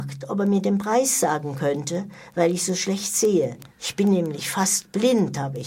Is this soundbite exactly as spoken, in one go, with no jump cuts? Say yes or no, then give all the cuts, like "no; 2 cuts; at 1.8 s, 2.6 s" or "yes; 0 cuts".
no; 1 cut; at 3.7 s